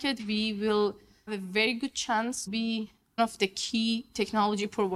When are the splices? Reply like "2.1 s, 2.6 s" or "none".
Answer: 1.3 s, 2.5 s, 3.2 s

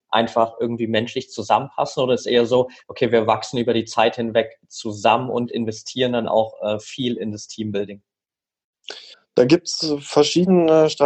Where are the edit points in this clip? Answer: 9.1 s

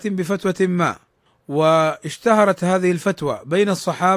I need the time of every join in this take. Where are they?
1.3 s

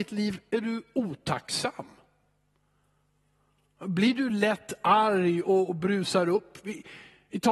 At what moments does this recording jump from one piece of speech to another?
none

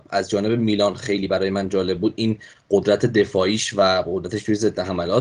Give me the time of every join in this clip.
none

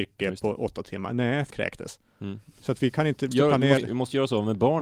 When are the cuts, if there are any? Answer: 1.5 s, 3.3 s, 3.8 s

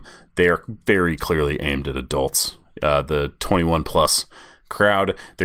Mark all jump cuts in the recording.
none

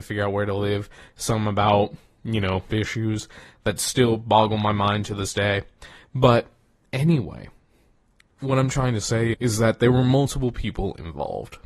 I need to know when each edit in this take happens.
2.7 s, 9.3 s

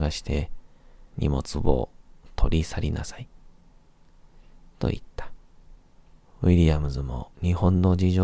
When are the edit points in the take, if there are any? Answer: 1.1 s, 6.0 s, 7.3 s

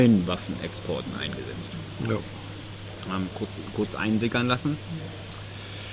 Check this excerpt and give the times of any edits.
none

